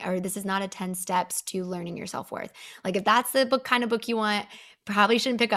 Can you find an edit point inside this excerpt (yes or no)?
no